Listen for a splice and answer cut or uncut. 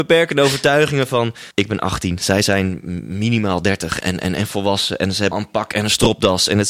cut